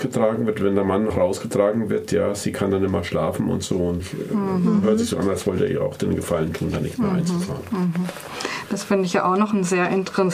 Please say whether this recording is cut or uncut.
cut